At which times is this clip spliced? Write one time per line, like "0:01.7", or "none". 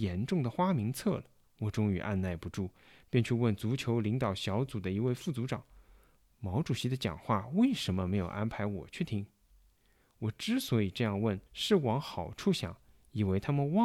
0:01.4
0:11.5